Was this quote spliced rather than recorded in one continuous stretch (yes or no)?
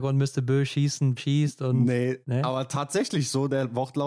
yes